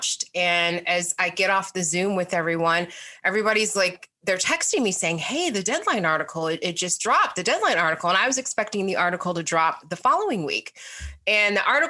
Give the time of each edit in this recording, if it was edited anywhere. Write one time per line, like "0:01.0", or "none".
none